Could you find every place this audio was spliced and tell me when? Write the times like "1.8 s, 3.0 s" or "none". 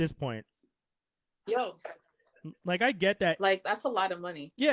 1.5 s